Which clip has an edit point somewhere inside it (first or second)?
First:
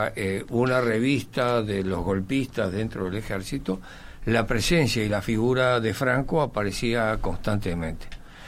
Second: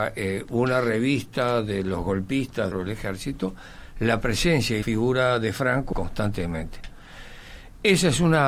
second